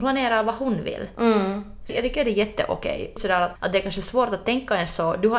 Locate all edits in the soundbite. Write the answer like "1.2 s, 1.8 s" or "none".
1.9 s, 3.2 s, 3.6 s